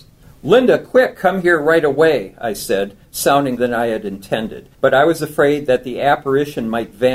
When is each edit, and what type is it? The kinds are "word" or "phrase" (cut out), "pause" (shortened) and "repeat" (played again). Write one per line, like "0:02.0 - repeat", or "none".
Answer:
0:03.6 - word
0:04.7 - pause